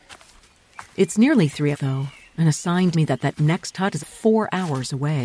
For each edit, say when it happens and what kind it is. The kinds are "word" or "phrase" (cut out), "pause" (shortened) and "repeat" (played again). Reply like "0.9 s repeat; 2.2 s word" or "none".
1.7 s word; 2.9 s word; 4.0 s word